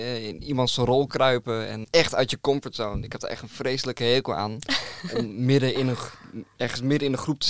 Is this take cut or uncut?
cut